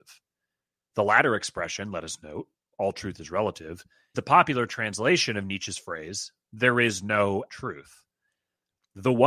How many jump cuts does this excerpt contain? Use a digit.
2